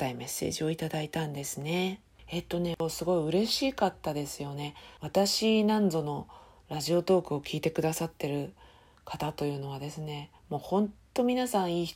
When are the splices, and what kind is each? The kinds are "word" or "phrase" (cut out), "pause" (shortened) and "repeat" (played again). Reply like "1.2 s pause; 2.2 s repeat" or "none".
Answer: 10.4 s pause